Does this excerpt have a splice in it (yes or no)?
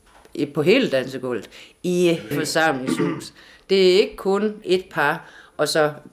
yes